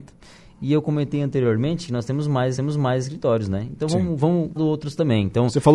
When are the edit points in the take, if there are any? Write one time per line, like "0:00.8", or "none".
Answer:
0:02.6
0:04.6

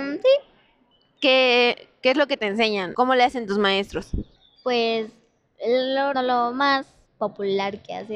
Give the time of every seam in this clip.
0:00.9
0:02.9
0:04.4
0:06.1

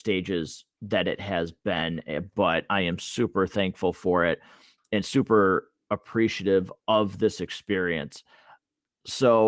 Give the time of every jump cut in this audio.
none

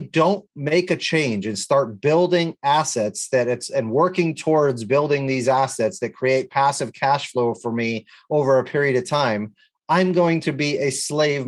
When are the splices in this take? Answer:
none

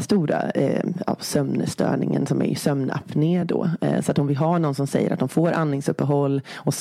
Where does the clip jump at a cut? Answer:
none

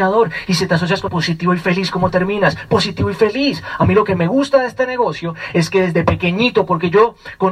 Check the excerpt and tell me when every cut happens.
0:01.1

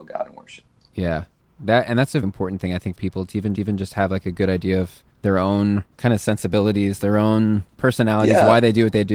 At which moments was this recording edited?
0:02.2
0:02.9
0:03.5
0:05.1
0:05.9
0:07.7

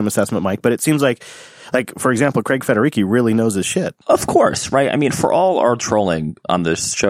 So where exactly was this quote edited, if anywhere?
0:04.0

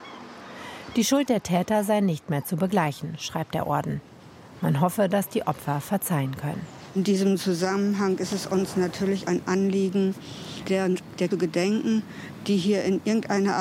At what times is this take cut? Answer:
0:11.3

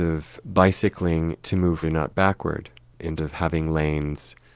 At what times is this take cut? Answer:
0:01.4
0:01.8
0:03.2

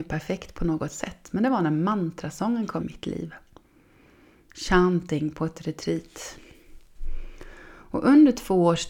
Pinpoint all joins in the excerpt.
0:02.8

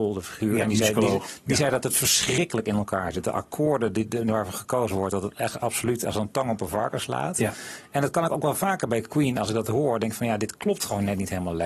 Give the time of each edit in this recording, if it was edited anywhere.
none

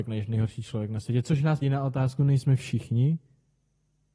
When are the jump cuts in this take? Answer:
0:01.6

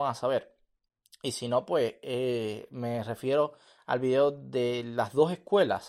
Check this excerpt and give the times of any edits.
none

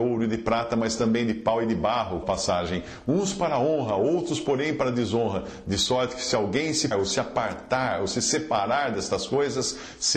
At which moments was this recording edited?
0:02.2
0:06.9

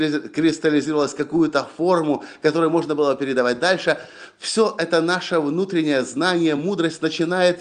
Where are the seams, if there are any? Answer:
none

